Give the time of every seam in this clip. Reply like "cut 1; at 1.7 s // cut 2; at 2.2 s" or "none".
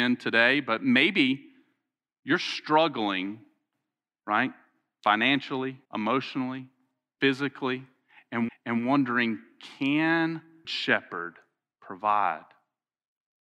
cut 1; at 5.8 s // cut 2; at 8.5 s // cut 3; at 10.6 s